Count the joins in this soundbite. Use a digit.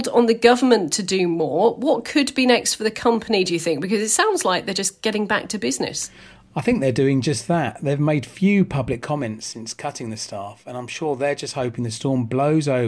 0